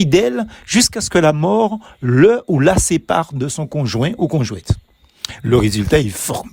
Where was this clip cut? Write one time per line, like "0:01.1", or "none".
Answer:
none